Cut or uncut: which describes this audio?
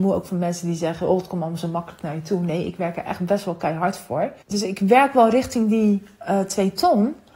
cut